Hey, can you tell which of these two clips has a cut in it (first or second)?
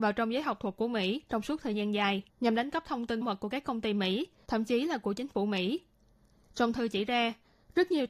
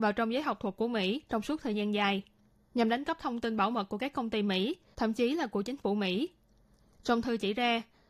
first